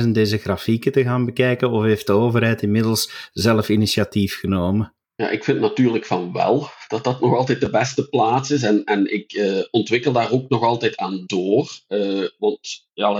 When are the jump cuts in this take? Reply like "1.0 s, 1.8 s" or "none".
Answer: 5.0 s